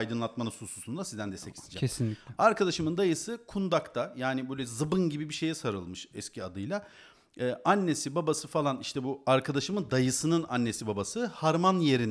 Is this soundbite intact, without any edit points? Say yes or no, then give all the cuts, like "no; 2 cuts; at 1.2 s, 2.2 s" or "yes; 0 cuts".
yes; 0 cuts